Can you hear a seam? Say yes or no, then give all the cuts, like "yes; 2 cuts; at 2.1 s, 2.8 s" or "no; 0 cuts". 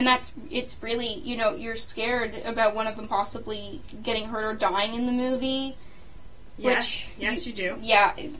no; 0 cuts